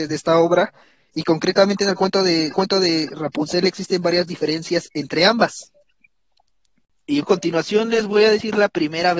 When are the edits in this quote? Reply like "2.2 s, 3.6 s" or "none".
2.5 s, 7.2 s